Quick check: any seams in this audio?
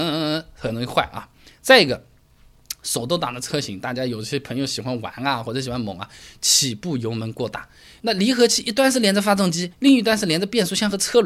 yes; 1 cut; at 9.7 s

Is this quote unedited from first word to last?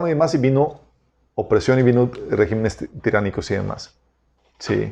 yes; 0 cuts

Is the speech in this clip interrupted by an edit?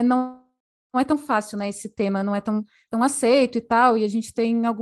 no; 0 cuts

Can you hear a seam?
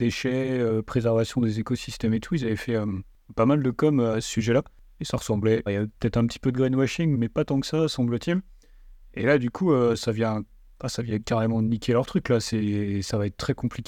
yes; 2 cuts; at 5.7 s, 7.1 s

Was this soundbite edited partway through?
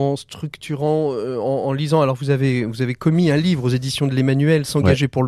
no; 0 cuts

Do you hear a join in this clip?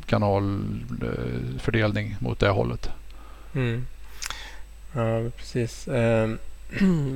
no; 0 cuts

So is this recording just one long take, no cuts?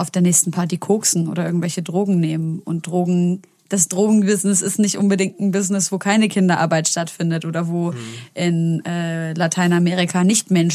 yes; 0 cuts

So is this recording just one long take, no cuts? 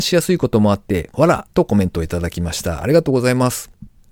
no; 1 cut; at 1.5 s

